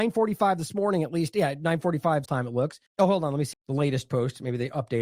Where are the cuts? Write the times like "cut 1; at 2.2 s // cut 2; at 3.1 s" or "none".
cut 1; at 2.3 s // cut 2; at 2.9 s // cut 3; at 3.5 s